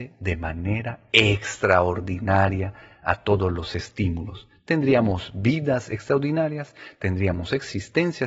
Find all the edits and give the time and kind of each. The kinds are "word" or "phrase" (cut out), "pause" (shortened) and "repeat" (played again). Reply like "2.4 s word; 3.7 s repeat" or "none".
none